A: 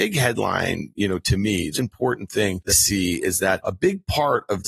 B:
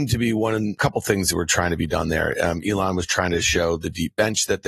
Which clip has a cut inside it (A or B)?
A